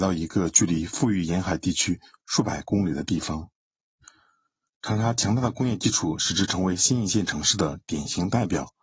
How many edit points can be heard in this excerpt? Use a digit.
0